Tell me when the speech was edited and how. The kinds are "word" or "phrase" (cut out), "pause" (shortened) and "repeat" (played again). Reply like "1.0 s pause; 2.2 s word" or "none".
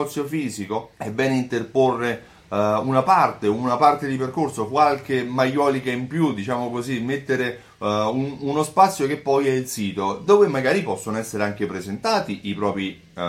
0.9 s pause